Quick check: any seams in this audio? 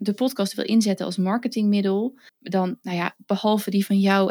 yes; 1 cut; at 2.3 s

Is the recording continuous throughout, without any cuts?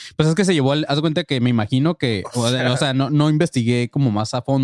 yes; 0 cuts

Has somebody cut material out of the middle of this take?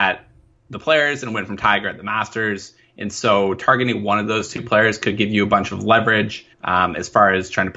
yes; 1 cut; at 6.5 s

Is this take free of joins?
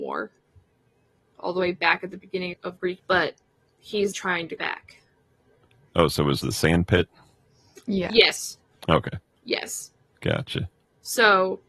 no; 6 cuts; at 1.3 s, 2.5 s, 3.0 s, 4.1 s, 4.6 s, 6.4 s

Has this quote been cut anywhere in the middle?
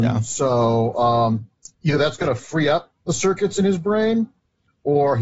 yes; 2 cuts; at 1.7 s, 3.0 s

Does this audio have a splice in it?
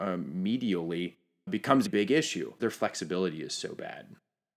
yes; 3 cuts; at 1.5 s, 1.9 s, 2.6 s

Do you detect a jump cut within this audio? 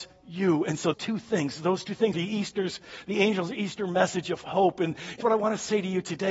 yes; 3 cuts; at 0.9 s, 2.1 s, 5.2 s

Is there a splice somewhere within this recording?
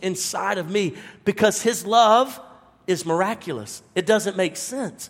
no; 0 cuts

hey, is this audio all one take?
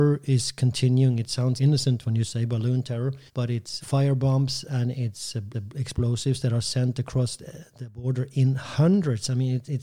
no; 4 cuts; at 1.6 s, 3.3 s, 3.8 s, 5.5 s

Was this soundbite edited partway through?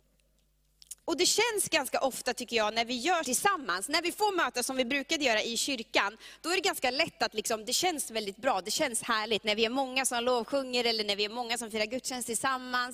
yes; 2 cuts; at 1.0 s, 3.2 s

